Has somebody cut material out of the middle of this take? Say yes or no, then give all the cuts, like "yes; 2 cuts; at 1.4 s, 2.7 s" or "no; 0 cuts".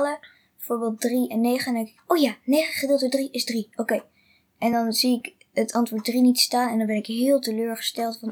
no; 0 cuts